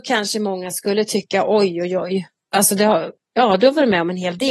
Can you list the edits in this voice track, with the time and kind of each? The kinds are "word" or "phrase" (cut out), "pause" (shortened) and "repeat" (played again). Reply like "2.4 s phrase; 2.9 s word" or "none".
2.4 s pause